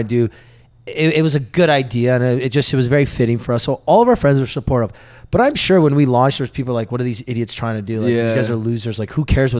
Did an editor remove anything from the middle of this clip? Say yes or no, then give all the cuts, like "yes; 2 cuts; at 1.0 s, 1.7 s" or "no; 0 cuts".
no; 0 cuts